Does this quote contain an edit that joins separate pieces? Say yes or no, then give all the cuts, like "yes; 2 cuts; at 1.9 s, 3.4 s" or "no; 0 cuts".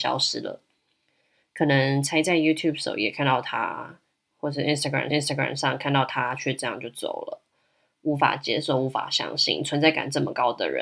yes; 1 cut; at 5.1 s